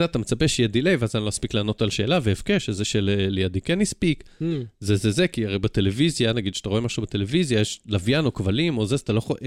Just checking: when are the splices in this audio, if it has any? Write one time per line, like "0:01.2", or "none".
none